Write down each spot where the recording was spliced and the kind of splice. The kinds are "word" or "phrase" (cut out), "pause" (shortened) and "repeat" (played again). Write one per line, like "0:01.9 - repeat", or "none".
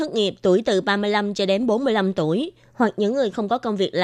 none

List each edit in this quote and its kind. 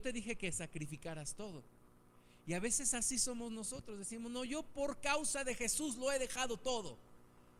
none

